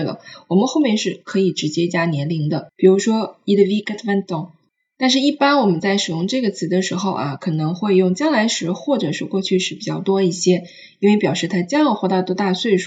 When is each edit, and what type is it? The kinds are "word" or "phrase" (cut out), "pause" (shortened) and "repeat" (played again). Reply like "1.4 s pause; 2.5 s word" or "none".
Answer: none